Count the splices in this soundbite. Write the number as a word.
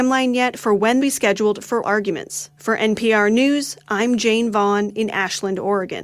three